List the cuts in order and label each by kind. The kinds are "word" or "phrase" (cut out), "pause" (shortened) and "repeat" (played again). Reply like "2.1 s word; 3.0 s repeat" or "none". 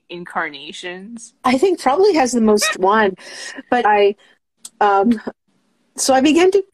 1.4 s pause; 1.8 s word; 2.7 s word; 3.8 s word

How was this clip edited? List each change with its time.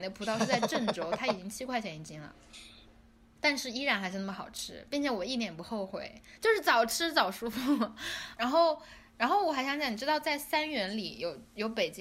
3.4 s word; 8.4 s word

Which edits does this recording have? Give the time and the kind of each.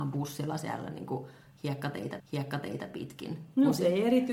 2.2 s repeat

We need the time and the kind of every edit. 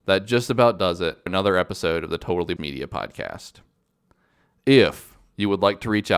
1.3 s word; 2.6 s word

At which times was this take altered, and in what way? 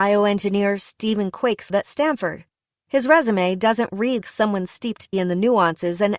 1.7 s word; 4.2 s word; 5.1 s word

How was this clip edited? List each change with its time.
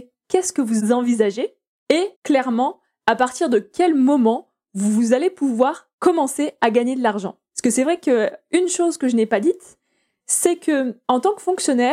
2.1 s pause

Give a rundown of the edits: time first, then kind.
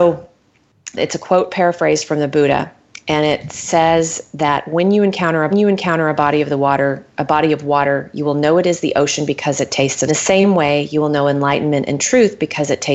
1.0 s word; 5.5 s repeat; 10.1 s phrase

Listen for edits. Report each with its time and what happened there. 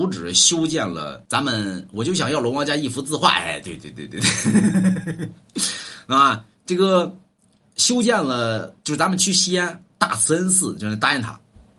1.2 s pause; 8.8 s pause

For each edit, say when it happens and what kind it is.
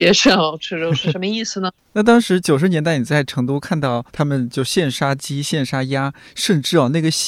4.1 s pause

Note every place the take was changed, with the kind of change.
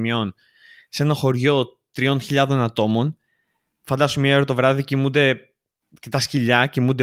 none

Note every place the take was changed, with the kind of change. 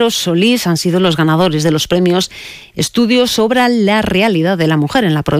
none

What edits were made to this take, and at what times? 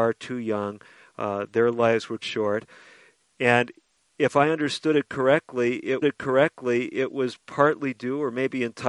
2.2 s word; 6.0 s repeat

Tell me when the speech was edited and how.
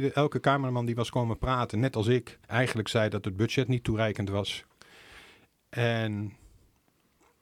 2.4 s pause

